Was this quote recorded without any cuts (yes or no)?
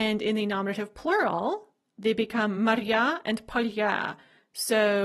yes